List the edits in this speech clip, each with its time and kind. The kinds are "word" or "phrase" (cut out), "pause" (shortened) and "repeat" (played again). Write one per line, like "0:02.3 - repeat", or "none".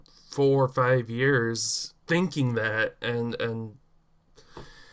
0:02.0 - pause

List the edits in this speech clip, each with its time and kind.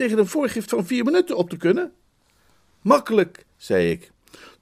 none

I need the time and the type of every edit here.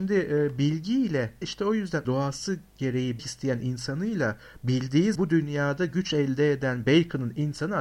0:01.4 - word
0:02.0 - word
0:03.2 - word
0:05.1 - word

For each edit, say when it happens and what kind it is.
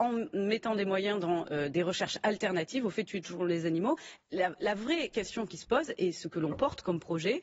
none

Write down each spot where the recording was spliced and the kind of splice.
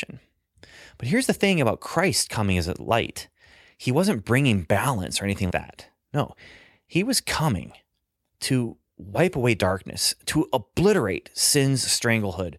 0:05.5 - word

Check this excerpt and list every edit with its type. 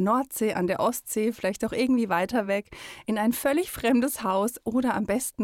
none

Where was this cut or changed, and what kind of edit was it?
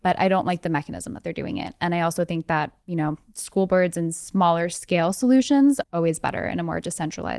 0:05.8 - word

